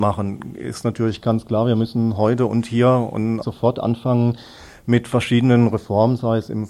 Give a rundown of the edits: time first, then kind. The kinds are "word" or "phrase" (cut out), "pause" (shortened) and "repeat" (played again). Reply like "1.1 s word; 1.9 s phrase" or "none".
3.4 s word